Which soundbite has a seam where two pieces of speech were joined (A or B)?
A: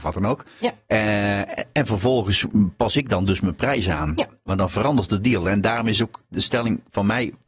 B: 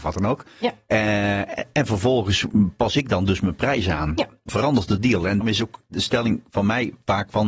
B